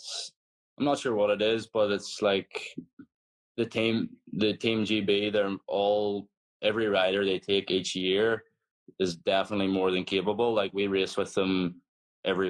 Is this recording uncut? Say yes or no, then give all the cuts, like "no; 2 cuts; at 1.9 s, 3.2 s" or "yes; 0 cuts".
yes; 0 cuts